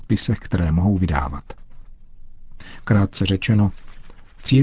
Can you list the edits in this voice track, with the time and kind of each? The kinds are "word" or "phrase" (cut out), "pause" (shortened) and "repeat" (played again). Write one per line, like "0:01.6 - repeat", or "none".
none